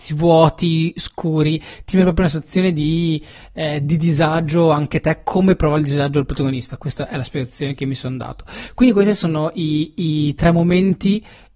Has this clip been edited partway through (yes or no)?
no